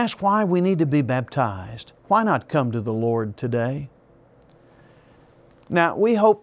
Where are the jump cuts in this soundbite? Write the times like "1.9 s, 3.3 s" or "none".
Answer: 2.0 s